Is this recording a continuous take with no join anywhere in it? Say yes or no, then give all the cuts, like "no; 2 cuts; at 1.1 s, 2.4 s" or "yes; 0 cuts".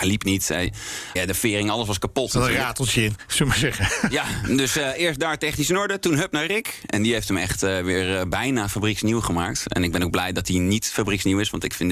no; 1 cut; at 1.2 s